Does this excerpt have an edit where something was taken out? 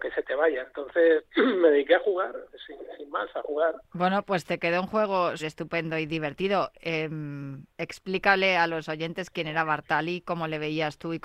yes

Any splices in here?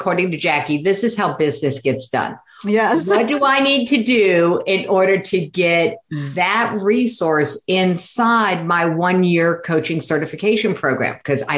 no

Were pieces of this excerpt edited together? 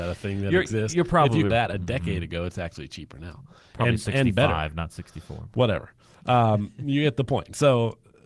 yes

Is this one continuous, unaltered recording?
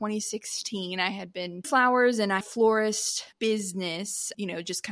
no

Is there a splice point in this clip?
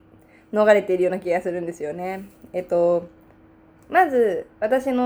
no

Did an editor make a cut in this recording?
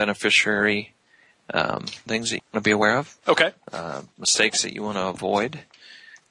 yes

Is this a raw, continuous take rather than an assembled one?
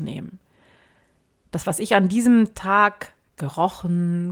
yes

